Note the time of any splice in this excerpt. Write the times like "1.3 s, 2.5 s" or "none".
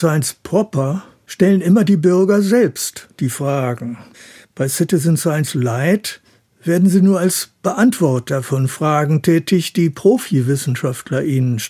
none